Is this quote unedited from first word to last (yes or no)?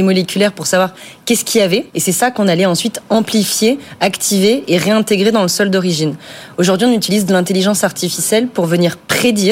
no